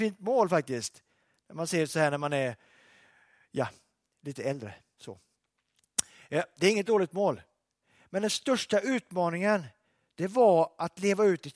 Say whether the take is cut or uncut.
uncut